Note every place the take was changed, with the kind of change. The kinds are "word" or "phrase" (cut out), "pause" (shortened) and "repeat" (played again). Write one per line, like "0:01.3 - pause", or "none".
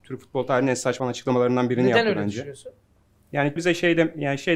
0:01.0 - word
0:03.6 - word